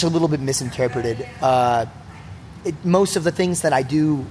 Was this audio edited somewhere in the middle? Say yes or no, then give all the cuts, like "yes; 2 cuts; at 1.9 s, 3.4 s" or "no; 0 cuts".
no; 0 cuts